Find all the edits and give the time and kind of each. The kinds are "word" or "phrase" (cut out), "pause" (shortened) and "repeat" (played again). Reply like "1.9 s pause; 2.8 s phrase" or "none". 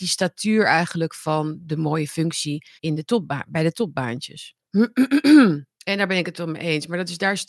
2.8 s pause; 5.7 s pause

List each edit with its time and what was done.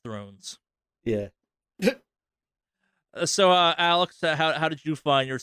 none

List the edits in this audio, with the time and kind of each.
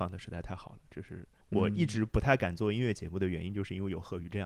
1.4 s pause

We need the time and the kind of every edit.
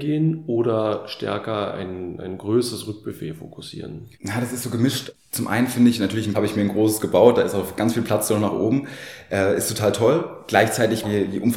4.1 s pause; 6.3 s phrase

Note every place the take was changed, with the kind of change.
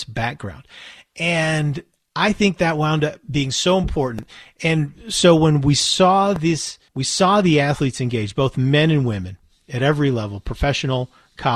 6.9 s pause

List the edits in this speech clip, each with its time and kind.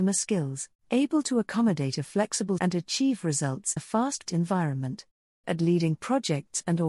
2.6 s word; 3.8 s word; 4.3 s word; 5.4 s word

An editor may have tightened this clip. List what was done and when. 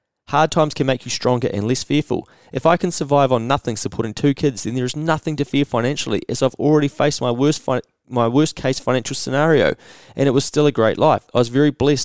none

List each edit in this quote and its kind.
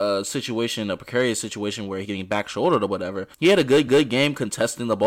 2.0 s word; 3.3 s pause; 3.9 s repeat

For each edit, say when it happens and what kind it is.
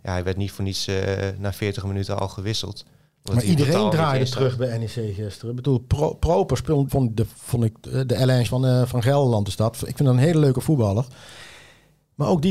6.9 s word; 8.5 s word

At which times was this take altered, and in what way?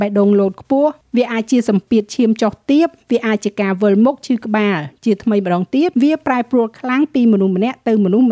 5.9 s pause

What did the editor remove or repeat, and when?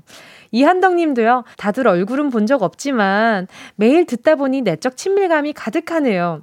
1.5 s pause

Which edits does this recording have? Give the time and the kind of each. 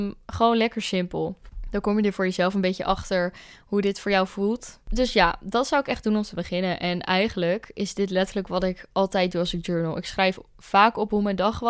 none

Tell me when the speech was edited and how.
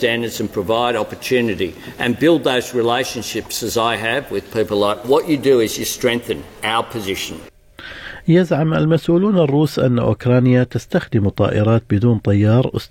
5.0 s phrase

